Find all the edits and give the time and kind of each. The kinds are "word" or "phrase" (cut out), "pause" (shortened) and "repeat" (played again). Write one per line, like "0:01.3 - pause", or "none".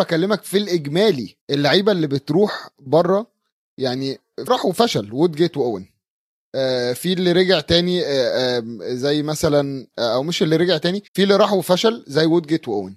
0:01.4 - pause
0:04.5 - phrase
0:11.1 - pause